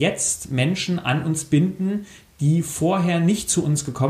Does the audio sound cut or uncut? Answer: uncut